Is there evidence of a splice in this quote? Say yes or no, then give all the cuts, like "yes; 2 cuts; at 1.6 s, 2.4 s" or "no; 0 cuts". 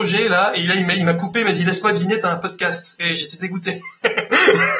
no; 0 cuts